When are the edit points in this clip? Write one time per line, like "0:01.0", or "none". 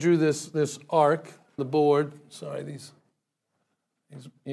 0:01.6